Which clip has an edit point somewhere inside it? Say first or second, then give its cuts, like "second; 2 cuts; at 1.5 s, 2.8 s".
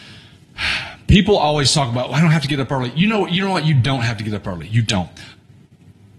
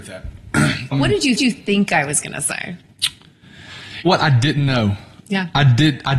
second; 3 cuts; at 0.9 s, 1.4 s, 4.1 s